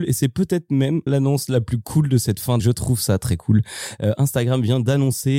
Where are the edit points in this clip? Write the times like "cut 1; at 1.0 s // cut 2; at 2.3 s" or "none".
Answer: cut 1; at 1.1 s // cut 2; at 2.6 s